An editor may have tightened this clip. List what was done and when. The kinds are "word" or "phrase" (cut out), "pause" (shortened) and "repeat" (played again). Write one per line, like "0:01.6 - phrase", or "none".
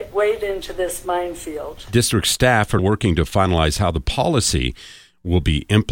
0:02.8 - word